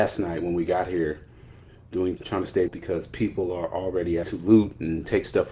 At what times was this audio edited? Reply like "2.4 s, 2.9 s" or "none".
2.2 s, 2.7 s, 4.2 s